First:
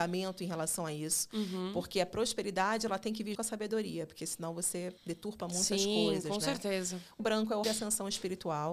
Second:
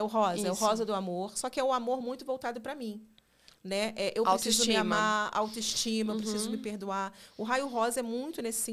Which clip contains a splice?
first; 4 cuts; at 3.3 s, 5.0 s, 7.2 s, 7.6 s

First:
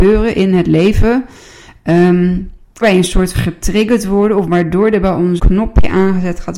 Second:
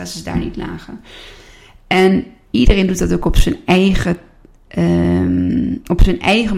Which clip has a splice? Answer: first; 3 cuts; at 2.8 s, 3.3 s, 5.4 s

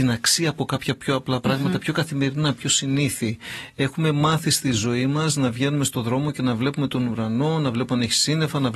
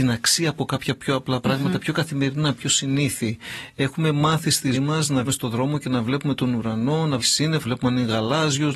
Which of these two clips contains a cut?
second; 4 cuts; at 4.7 s, 5.3 s, 7.2 s, 7.6 s

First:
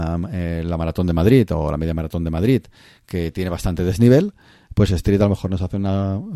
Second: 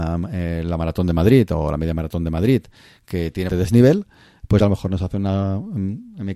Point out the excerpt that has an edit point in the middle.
second; 2 cuts; at 3.5 s, 4.6 s

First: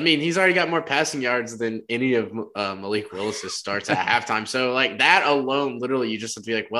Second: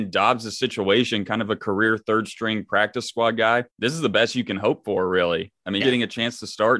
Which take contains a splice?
second; 2 cuts; at 3.7 s, 5.8 s

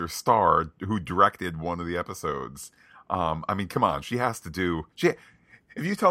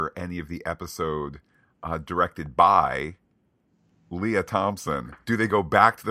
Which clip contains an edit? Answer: first; 1 cut; at 4.9 s

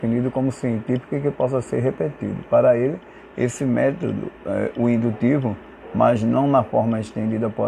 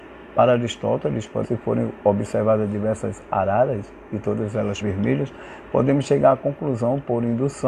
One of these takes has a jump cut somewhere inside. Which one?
second; 2 cuts; at 1.4 s, 4.8 s

